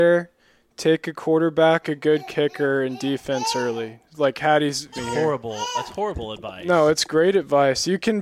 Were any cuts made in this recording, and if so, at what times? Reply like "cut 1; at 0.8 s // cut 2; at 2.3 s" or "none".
cut 1; at 1.8 s // cut 2; at 4.9 s